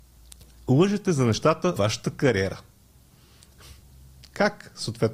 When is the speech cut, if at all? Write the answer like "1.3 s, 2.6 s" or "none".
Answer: 1.8 s